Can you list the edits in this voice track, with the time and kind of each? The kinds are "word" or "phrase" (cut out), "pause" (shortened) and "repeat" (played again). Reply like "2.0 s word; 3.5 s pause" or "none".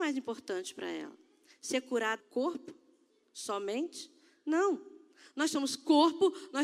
2.2 s word